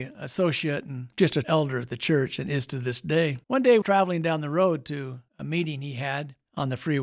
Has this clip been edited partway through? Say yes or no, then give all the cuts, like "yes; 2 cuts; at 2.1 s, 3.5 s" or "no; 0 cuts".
yes; 4 cuts; at 1.4 s, 3.4 s, 3.8 s, 5.3 s